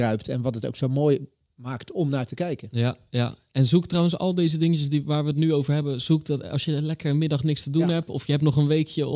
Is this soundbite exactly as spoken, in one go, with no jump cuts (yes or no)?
yes